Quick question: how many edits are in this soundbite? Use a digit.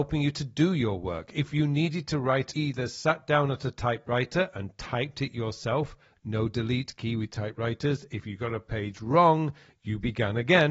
1